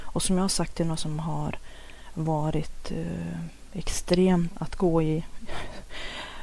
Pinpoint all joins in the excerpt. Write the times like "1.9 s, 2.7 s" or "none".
1.0 s, 4.5 s